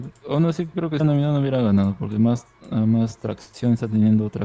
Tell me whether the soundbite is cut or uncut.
cut